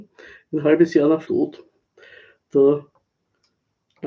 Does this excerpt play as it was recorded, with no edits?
no; 1 cut; at 1.2 s

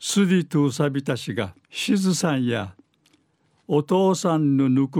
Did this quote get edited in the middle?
yes; 1 cut; at 1.6 s

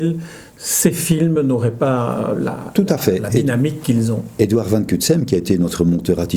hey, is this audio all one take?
yes; 0 cuts

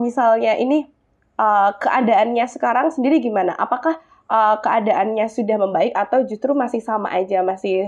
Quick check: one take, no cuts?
yes; 0 cuts

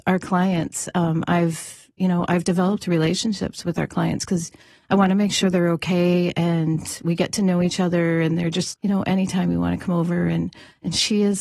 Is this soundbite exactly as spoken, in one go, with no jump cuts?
no; 1 cut; at 8.7 s

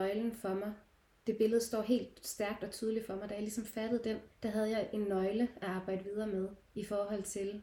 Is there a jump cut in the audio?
yes; 2 cuts; at 4.3 s, 6.6 s

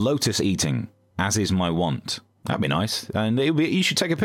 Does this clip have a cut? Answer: no; 0 cuts

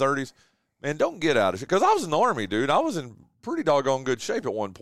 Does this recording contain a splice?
no; 0 cuts

